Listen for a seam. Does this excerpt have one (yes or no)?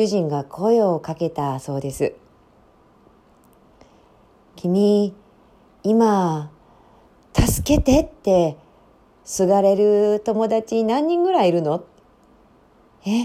no